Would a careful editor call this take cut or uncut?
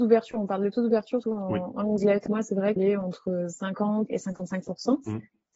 cut